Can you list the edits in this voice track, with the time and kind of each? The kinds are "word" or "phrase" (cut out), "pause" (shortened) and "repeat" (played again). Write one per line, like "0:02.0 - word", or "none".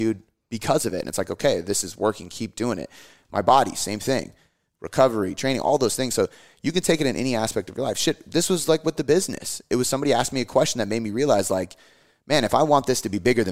none